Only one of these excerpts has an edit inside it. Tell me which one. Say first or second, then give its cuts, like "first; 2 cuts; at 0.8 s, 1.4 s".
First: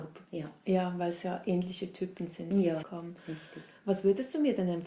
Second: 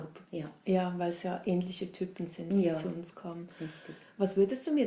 first; 1 cut; at 2.8 s